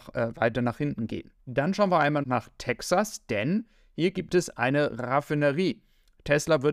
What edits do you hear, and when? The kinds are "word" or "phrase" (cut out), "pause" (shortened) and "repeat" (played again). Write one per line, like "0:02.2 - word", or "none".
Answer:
0:01.4 - pause
0:02.2 - word